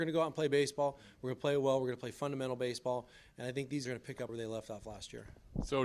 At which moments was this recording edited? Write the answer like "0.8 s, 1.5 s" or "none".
3.8 s, 4.3 s